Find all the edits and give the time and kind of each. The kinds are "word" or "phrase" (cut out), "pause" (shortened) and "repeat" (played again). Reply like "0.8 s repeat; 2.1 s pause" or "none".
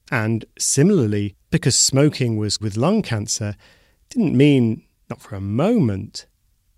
1.5 s word; 2.6 s word; 5.0 s pause

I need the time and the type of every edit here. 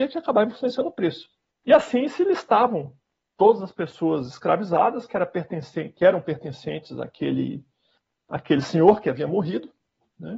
none

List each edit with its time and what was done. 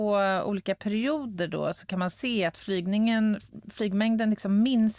none

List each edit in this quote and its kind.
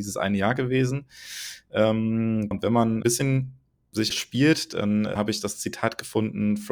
2.5 s word; 3.0 s phrase; 4.1 s phrase; 5.2 s word

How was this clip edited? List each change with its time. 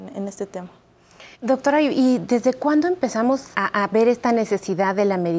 1.3 s pause; 3.5 s word

